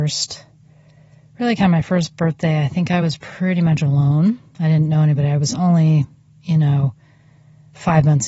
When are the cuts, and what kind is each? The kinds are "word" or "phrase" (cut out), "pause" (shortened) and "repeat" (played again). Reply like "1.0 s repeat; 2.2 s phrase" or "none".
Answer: none